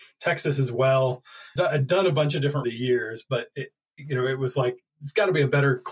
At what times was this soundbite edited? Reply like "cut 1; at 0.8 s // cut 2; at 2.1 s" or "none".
cut 1; at 1.6 s // cut 2; at 2.6 s